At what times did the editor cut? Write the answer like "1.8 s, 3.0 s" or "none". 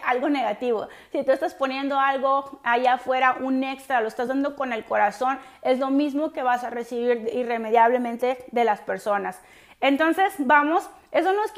none